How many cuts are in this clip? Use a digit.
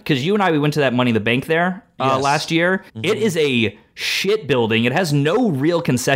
1